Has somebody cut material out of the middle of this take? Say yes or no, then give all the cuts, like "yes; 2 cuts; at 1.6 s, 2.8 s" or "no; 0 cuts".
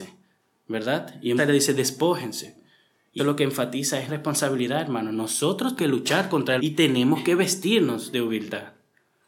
yes; 5 cuts; at 1.4 s, 3.2 s, 4.1 s, 5.8 s, 6.6 s